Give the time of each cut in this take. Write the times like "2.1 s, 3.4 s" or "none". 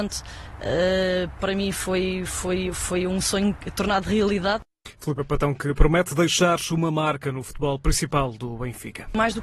none